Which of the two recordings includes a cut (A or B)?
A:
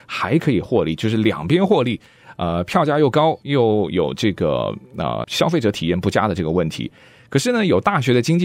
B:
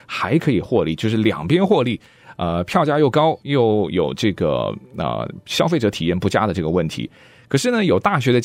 A